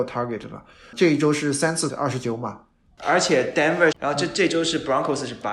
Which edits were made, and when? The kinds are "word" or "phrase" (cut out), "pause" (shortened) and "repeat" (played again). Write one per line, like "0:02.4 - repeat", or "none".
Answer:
0:01.9 - word
0:03.9 - word